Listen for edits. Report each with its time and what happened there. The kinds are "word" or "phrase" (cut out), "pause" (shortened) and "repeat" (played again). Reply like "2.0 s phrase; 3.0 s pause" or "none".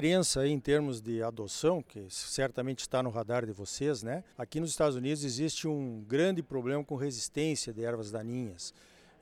4.3 s pause